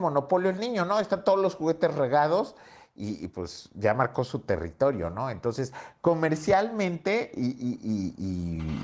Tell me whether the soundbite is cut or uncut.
uncut